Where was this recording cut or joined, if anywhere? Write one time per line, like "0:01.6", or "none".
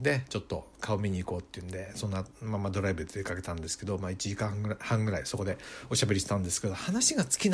none